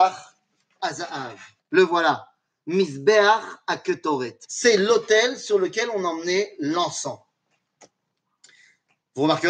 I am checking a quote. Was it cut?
yes; 2 cuts; at 1.6 s, 4.4 s

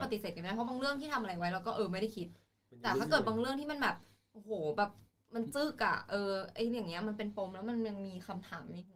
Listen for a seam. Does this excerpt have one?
no; 0 cuts

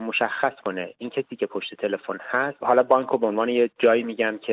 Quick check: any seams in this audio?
no; 0 cuts

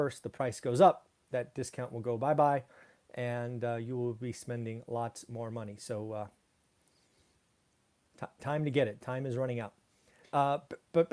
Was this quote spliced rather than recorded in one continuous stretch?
no; 0 cuts

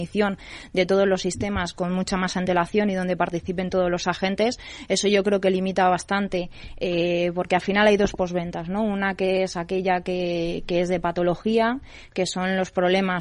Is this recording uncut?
yes; 0 cuts

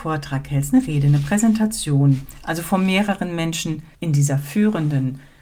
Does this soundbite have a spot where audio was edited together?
yes; 1 cut; at 3.9 s

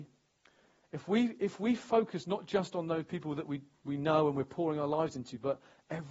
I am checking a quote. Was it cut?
no; 0 cuts

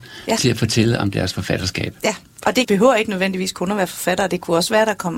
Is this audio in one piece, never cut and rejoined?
no; 2 cuts; at 2.3 s, 2.6 s

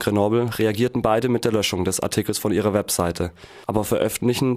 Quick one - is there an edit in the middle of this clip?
yes; 1 cut; at 3.6 s

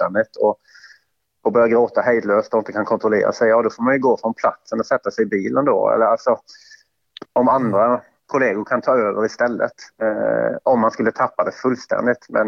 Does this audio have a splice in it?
yes; 2 cuts; at 7.3 s, 9.9 s

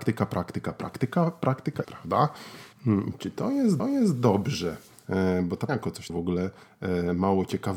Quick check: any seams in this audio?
yes; 5 cuts; at 1.8 s, 2.7 s, 3.8 s, 5.7 s, 6.1 s

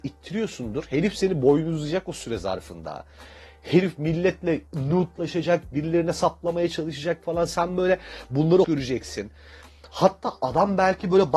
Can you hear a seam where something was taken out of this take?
yes; 2 cuts; at 4.7 s, 8.6 s

